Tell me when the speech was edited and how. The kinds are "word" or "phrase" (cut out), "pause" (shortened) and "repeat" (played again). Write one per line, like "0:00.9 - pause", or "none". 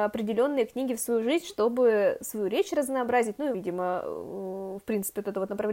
0:03.5 - word